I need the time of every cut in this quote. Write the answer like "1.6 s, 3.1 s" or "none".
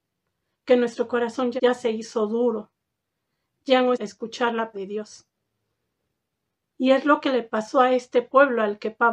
1.6 s, 3.9 s, 4.7 s